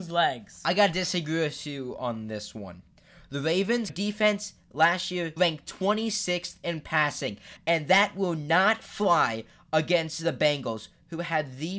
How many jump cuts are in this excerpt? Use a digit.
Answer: 0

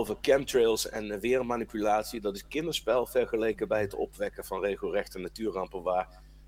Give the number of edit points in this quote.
0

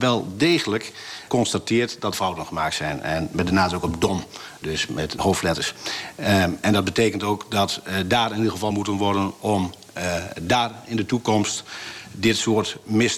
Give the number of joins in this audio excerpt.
6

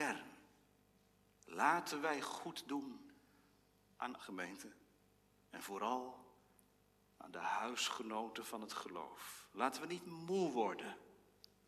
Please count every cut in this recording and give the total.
1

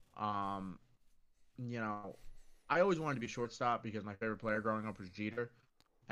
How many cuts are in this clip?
1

